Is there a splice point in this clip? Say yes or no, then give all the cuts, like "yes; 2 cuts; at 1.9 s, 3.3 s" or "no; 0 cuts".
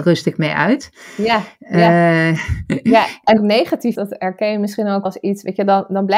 yes; 3 cuts; at 3.4 s, 3.9 s, 5.1 s